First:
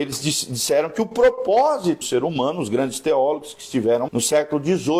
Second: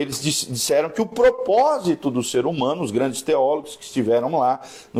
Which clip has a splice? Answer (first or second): first